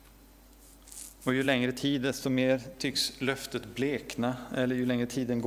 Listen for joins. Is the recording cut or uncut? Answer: uncut